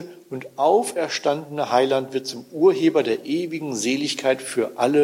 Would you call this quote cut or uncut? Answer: uncut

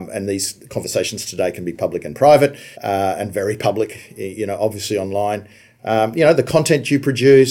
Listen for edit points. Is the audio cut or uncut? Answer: cut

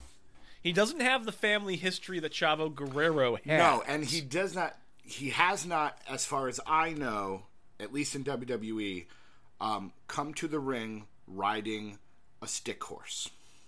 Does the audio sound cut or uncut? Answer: uncut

